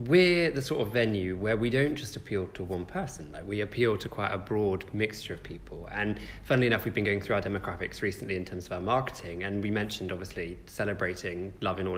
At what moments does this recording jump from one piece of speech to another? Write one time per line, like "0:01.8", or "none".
none

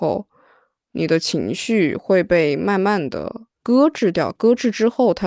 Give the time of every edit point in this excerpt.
0:03.5

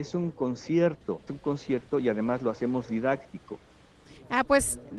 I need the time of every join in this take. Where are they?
0:01.3

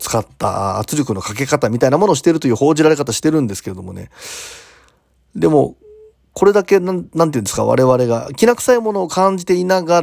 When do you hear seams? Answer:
none

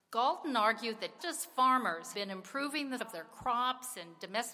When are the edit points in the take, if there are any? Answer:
0:01.2
0:02.1
0:03.0

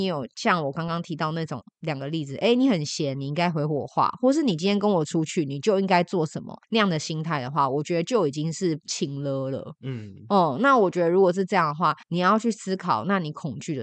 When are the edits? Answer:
0:06.6
0:08.8
0:12.0

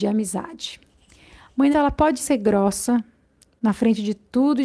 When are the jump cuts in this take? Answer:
0:01.7
0:02.2

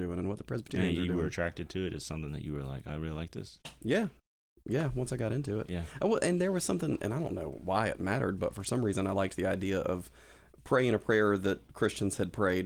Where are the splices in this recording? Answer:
none

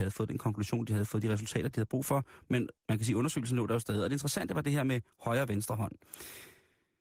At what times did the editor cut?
0:02.8

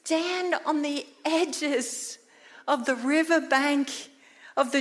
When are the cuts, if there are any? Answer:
none

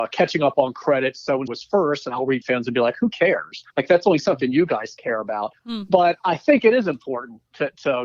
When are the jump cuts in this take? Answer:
0:01.5
0:02.4
0:03.7
0:05.6

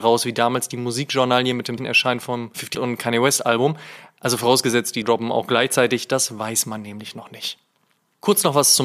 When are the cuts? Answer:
0:01.8
0:02.7
0:05.0

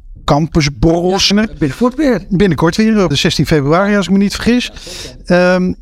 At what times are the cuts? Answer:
0:01.3
0:03.1

